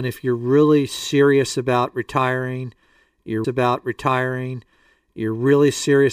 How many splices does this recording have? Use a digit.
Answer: 1